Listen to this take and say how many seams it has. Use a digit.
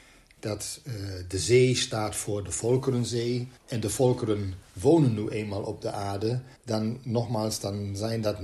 2